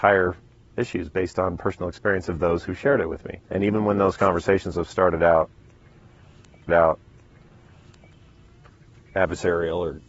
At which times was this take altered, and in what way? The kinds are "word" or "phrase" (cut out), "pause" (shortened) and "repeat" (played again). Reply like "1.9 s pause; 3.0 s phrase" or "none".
3.4 s pause; 6.7 s repeat